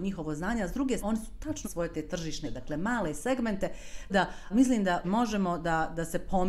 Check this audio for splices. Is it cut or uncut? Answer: cut